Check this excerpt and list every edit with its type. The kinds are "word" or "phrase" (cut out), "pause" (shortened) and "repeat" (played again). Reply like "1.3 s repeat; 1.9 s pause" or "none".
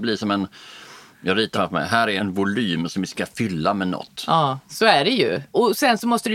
1.5 s phrase; 4.6 s pause

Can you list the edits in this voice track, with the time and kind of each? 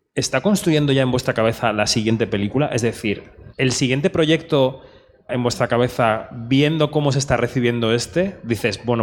3.5 s pause; 5.3 s word

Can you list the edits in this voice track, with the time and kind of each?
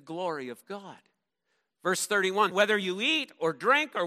1.3 s pause; 2.5 s word

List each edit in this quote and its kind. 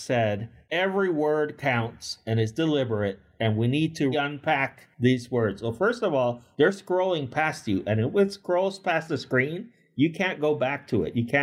4.1 s word

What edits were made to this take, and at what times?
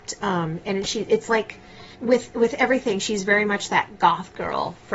1.9 s pause

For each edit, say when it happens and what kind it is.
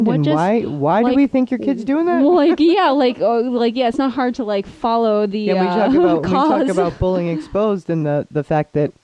none

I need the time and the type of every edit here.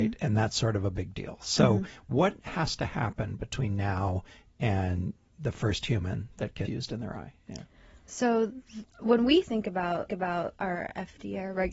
6.7 s phrase; 8.9 s pause; 10.1 s repeat

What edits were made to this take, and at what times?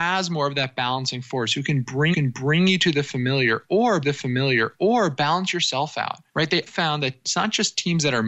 2.1 s repeat; 4.0 s repeat; 6.3 s pause; 6.7 s word

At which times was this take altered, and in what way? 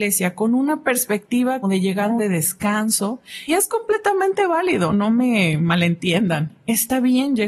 1.6 s word; 2.2 s word; 3.5 s word; 4.9 s word

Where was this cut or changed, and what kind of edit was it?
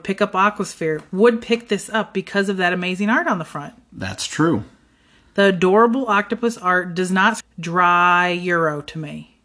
7.4 s word

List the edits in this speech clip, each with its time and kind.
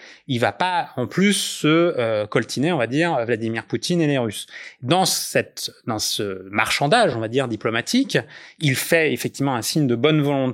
none

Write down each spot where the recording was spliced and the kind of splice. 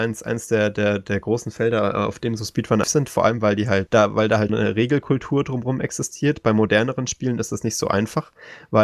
2.8 s word; 3.9 s word; 4.5 s word

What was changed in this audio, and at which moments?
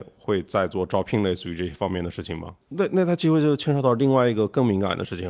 2.6 s pause

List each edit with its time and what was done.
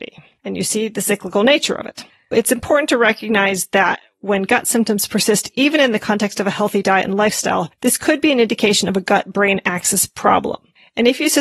2.1 s pause; 7.7 s pause

